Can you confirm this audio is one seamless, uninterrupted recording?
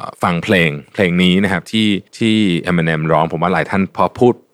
no; 1 cut; at 2.1 s

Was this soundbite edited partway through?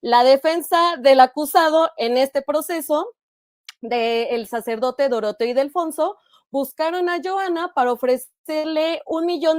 no; 0 cuts

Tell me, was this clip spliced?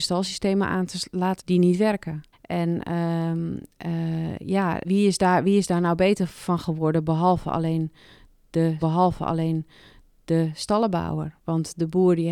yes; 4 cuts; at 1.4 s, 2.3 s, 4.8 s, 8.8 s

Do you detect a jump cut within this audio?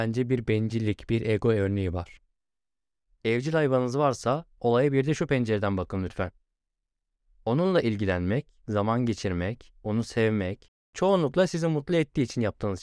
no; 0 cuts

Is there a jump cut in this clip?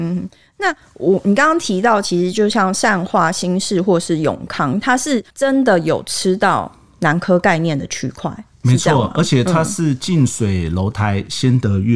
yes; 1 cut; at 5.3 s

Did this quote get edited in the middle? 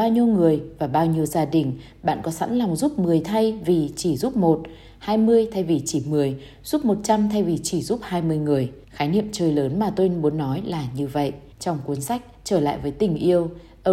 yes; 2 cuts; at 8.8 s, 11.5 s

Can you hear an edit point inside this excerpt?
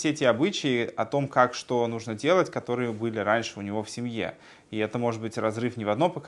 no; 0 cuts

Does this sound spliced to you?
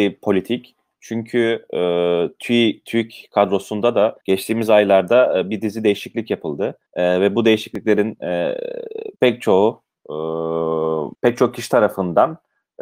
yes; 4 cuts; at 4.2 s, 6.9 s, 9.2 s, 11.1 s

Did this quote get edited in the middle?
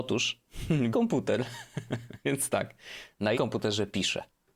yes; 3 cuts; at 0.9 s, 2.2 s, 3.3 s

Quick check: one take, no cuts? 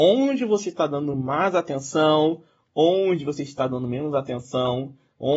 yes; 0 cuts

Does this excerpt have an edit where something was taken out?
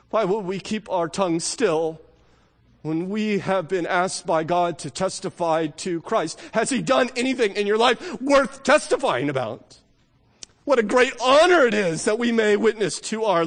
no; 0 cuts

